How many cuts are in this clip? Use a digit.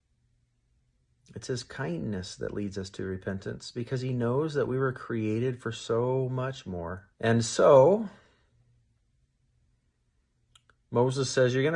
1